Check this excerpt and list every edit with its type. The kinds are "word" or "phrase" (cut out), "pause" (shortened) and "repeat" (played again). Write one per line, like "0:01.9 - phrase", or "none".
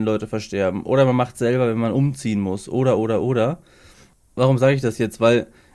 none